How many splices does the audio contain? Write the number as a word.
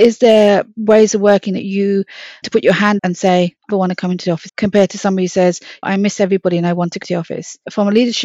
six